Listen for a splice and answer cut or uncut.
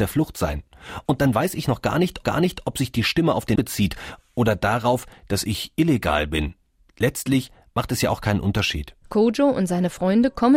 cut